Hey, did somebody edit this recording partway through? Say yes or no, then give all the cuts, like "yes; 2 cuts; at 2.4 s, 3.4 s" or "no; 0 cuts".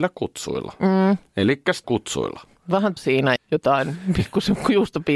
yes; 3 cuts; at 1.8 s, 3.0 s, 3.4 s